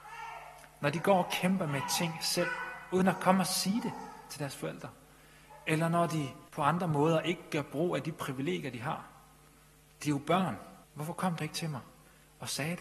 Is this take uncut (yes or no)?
no